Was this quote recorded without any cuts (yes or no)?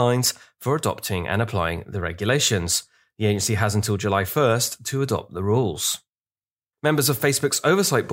yes